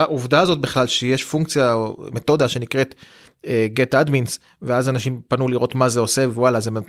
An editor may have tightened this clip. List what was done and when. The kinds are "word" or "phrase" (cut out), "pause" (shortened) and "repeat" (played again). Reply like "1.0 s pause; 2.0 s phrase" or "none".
none